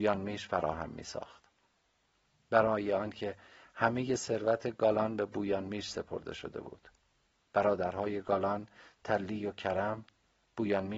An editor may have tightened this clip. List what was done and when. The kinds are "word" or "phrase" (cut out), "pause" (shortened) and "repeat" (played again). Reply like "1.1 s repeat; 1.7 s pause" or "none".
none